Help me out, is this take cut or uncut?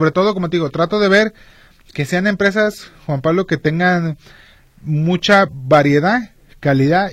uncut